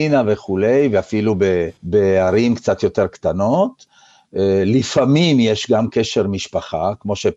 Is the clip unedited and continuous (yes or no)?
no